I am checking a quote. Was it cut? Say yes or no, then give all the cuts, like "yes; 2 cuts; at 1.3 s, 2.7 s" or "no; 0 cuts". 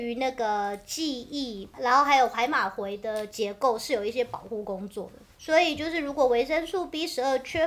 yes; 1 cut; at 5.3 s